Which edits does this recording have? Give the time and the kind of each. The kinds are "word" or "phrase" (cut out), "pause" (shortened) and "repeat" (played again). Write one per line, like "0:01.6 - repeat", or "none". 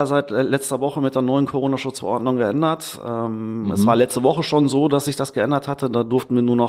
none